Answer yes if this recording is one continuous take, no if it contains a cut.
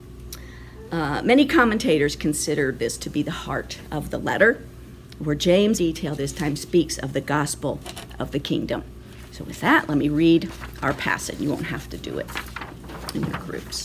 no